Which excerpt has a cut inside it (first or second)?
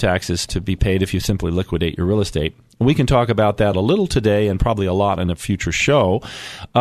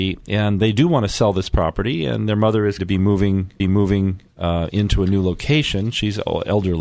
second